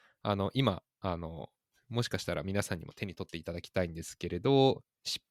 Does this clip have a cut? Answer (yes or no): no